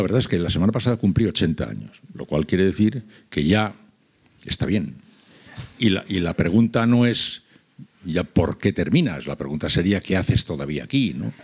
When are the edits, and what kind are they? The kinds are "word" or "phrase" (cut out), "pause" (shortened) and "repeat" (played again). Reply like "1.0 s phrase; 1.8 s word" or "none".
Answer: none